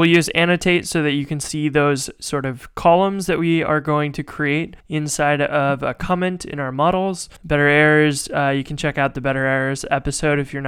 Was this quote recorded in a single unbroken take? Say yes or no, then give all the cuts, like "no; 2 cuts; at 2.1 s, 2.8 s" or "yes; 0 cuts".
no; 2 cuts; at 4.8 s, 7.4 s